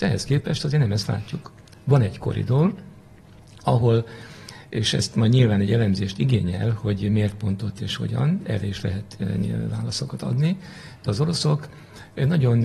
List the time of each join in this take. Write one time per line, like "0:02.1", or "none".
none